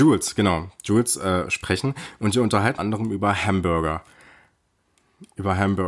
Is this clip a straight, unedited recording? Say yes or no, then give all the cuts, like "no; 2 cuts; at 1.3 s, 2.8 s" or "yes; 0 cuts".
no; 1 cut; at 2.8 s